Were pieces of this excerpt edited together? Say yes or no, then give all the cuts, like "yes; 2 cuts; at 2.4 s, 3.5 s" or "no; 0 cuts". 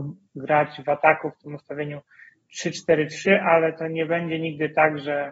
no; 0 cuts